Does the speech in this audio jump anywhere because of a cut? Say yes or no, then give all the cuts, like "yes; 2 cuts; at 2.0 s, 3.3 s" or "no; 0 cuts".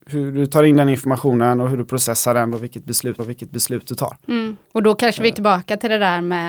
yes; 3 cuts; at 3.2 s, 4.6 s, 5.3 s